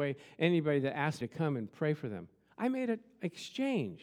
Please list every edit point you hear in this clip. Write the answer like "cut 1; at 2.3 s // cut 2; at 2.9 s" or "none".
cut 1; at 1.2 s